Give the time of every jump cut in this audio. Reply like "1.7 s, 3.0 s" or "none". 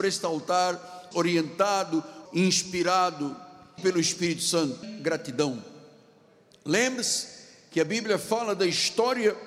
1.1 s, 2.3 s, 3.8 s, 4.8 s